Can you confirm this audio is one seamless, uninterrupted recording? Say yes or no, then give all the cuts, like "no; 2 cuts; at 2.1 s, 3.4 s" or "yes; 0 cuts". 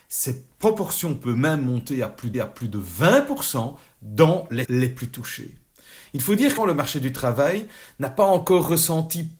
no; 3 cuts; at 2.3 s, 4.6 s, 6.6 s